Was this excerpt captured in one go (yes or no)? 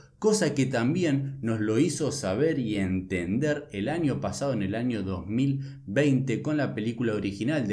yes